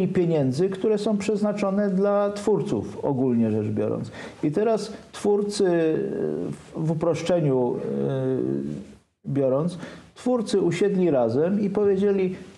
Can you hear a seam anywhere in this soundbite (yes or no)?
no